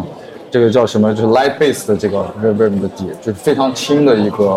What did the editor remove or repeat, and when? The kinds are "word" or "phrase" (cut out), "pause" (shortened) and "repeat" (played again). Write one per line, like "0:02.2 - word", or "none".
0:02.6 - word